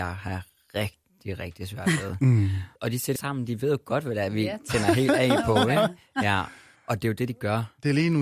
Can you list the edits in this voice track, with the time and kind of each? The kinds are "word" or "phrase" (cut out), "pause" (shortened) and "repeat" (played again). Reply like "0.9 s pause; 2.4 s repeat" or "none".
2.8 s pause; 3.2 s phrase; 6.8 s pause